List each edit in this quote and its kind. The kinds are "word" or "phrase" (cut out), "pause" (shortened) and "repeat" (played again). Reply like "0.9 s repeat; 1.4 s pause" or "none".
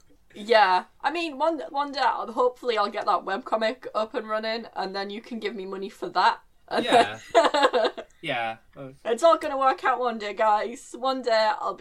1.7 s word